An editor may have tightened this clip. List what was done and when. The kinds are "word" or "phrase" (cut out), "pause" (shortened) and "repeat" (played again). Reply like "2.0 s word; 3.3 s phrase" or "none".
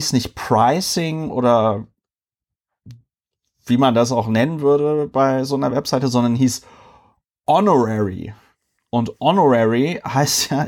none